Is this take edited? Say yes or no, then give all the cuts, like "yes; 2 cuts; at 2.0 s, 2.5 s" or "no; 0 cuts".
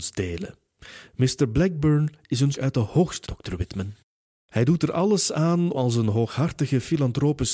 yes; 3 cuts; at 2.5 s, 3.2 s, 5.7 s